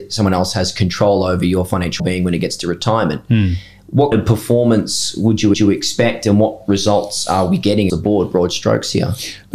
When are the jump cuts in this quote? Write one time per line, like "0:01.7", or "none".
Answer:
0:02.0
0:04.1
0:05.5
0:07.9